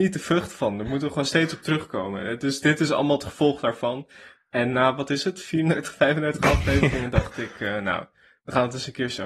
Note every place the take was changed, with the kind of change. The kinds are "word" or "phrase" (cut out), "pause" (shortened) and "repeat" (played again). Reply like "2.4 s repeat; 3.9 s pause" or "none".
none

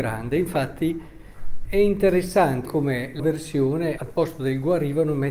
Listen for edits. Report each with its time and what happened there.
1.7 s word; 2.7 s word; 3.2 s word; 4.0 s word

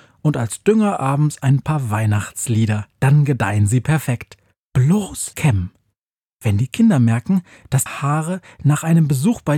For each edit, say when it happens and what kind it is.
2.9 s pause; 5.3 s word; 7.9 s word

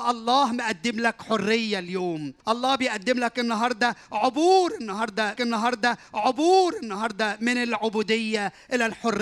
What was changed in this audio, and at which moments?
2.4 s pause; 5.3 s repeat

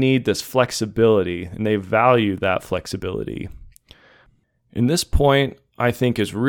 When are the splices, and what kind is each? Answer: none

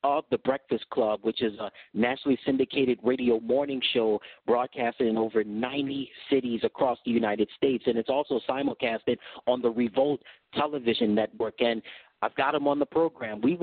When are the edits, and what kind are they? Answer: none

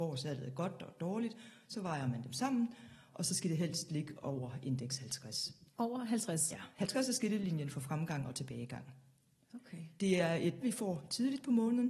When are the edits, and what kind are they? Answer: 5.7 s pause; 10.6 s word

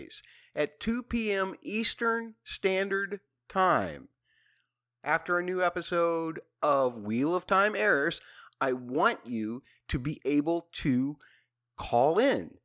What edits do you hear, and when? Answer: none

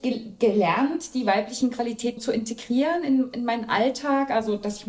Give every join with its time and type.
2.2 s word

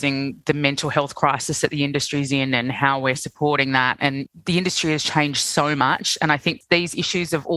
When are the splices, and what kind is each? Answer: none

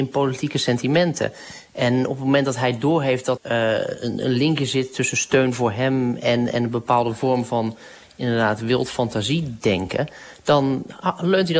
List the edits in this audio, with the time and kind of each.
3.4 s word

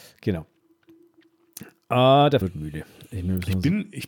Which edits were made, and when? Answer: 2.4 s word

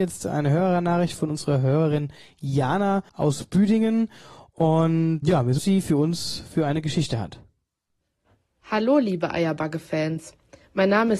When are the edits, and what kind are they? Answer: 3.1 s pause; 5.2 s word; 5.6 s phrase

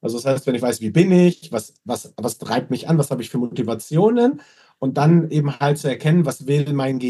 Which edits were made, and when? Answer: none

